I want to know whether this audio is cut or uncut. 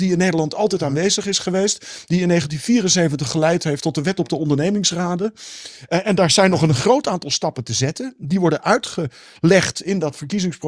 uncut